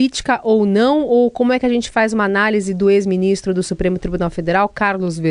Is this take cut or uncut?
uncut